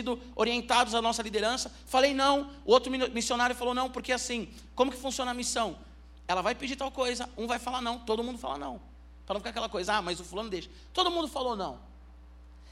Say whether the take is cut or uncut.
uncut